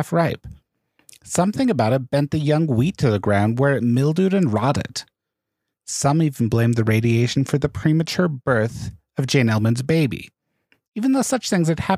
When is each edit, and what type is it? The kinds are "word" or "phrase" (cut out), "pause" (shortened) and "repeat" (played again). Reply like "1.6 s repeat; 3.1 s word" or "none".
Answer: none